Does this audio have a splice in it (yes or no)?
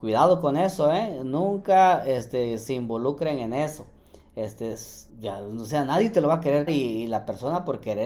yes